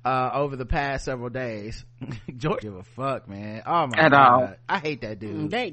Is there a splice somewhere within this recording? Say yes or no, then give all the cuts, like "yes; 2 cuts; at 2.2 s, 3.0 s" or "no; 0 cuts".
yes; 1 cut; at 2.6 s